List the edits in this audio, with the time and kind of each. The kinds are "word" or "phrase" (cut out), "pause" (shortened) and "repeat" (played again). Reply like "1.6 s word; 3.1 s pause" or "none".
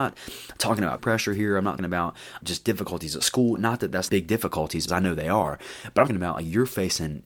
1.0 s word; 1.8 s word; 2.4 s word; 3.6 s word; 4.1 s word; 4.9 s word; 6.1 s word